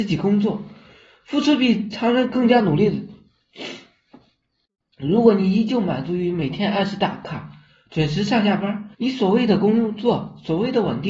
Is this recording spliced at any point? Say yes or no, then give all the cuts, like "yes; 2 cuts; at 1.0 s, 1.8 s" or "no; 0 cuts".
yes; 1 cut; at 8.9 s